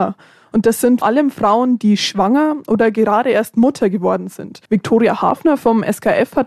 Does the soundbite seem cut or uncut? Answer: cut